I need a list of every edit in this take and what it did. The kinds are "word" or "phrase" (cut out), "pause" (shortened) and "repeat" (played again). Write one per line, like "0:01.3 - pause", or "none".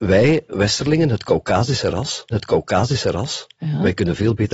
0:02.3 - repeat